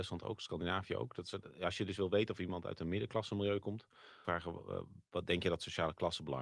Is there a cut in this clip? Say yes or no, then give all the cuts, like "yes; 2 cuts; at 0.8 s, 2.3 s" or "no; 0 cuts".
yes; 1 cut; at 4.2 s